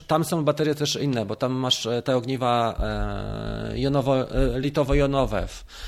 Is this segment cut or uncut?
uncut